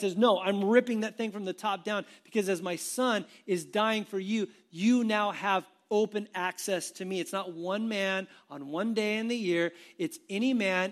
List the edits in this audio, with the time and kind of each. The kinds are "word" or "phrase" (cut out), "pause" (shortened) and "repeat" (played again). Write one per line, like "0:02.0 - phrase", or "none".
none